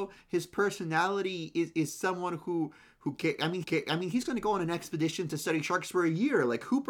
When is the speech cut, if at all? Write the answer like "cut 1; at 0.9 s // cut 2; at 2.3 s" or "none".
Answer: cut 1; at 3.6 s